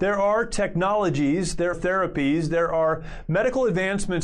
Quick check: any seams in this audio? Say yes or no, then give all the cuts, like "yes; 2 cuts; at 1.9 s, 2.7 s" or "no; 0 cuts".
yes; 1 cut; at 1.7 s